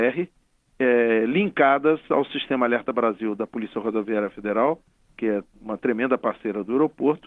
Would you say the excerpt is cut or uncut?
uncut